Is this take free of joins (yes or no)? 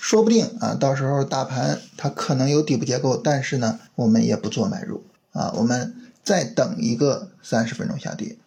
no